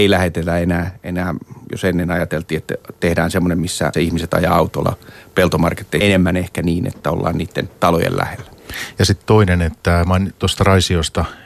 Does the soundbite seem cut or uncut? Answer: cut